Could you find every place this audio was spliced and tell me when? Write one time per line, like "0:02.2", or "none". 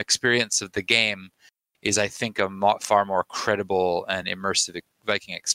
none